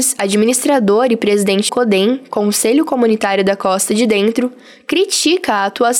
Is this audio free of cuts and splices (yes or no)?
no